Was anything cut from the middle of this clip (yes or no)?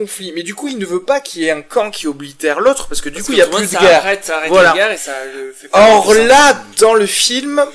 yes